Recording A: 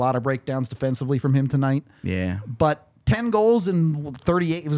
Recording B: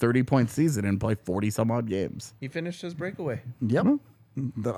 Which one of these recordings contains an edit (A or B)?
B